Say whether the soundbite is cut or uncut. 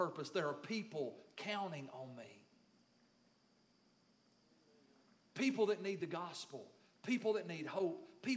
uncut